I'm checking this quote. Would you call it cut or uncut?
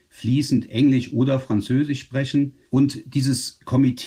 cut